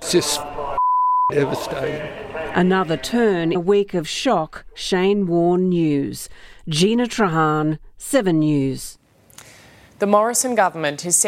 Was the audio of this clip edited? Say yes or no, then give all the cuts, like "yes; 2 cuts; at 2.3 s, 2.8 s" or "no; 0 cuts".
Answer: yes; 1 cut; at 3.5 s